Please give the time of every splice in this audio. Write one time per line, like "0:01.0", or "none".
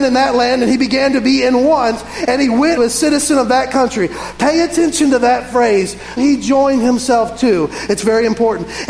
0:02.8
0:06.2